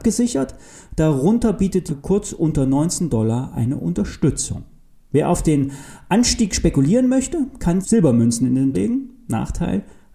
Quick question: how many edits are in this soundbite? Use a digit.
3